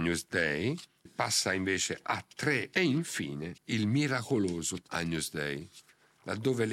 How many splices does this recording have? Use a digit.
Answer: 4